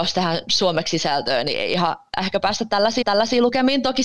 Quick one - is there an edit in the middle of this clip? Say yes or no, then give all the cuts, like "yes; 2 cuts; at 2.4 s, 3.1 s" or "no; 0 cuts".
yes; 1 cut; at 3.0 s